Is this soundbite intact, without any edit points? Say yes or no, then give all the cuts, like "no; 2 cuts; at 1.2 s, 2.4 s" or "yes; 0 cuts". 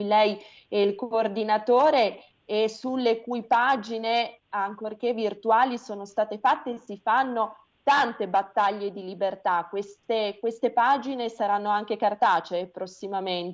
yes; 0 cuts